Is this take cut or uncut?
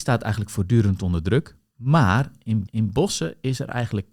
cut